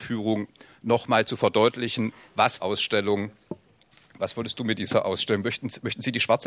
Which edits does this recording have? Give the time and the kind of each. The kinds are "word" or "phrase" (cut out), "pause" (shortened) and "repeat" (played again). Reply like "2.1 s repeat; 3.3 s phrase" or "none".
2.6 s phrase